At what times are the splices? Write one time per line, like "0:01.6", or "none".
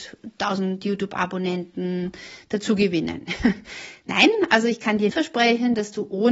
0:05.1